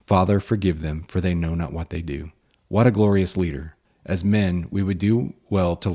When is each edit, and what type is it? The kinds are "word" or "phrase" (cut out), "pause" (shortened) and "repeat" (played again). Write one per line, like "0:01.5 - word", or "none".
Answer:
0:02.4 - pause
0:03.8 - pause